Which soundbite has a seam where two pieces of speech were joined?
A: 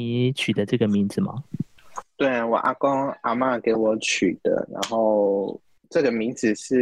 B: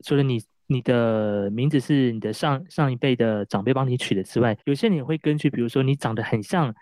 B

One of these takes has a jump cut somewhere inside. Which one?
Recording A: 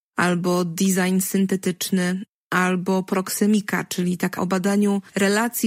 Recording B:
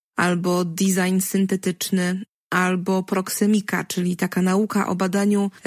A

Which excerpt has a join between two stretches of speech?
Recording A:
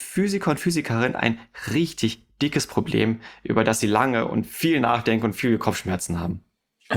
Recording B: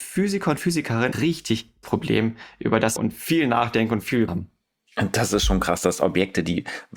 B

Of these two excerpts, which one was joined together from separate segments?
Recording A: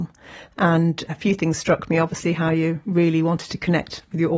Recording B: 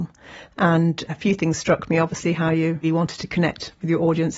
B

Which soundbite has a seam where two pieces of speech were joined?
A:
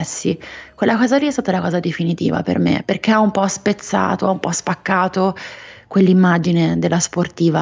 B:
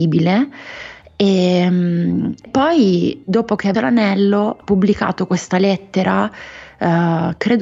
B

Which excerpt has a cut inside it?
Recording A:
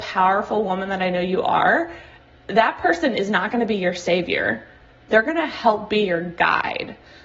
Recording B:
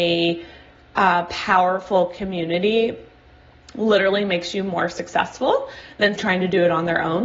B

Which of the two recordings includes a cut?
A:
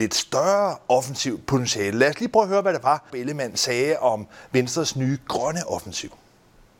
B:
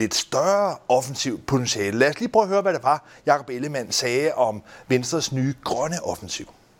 A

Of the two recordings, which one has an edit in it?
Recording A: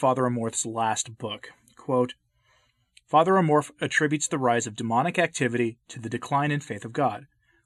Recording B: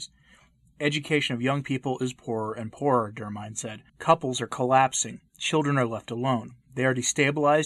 B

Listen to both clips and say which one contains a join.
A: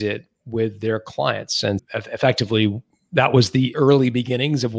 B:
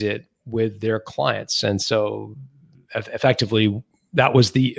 A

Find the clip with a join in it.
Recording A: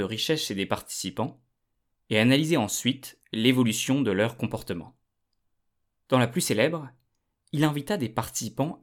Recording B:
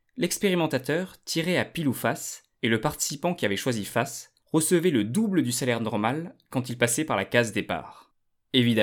B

